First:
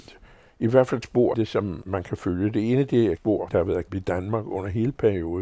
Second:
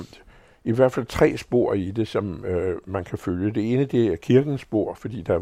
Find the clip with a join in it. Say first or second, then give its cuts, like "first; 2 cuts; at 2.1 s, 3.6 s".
first; 6 cuts; at 1.0 s, 1.3 s, 1.8 s, 3.2 s, 3.5 s, 3.9 s